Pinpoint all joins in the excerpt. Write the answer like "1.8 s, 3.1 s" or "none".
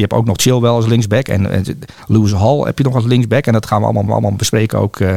4.1 s